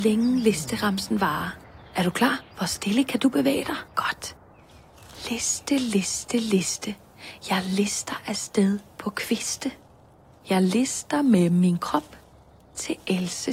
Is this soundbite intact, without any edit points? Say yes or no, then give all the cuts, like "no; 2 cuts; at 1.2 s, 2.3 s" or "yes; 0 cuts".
no; 3 cuts; at 1.9 s, 2.5 s, 3.9 s